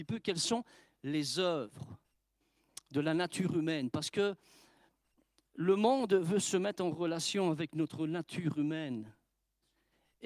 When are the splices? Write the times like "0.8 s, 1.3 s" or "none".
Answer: none